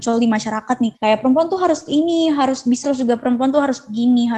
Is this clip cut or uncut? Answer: cut